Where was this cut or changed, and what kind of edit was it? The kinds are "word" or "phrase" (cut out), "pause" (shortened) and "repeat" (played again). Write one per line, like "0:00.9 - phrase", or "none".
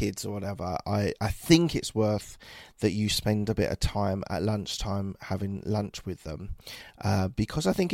none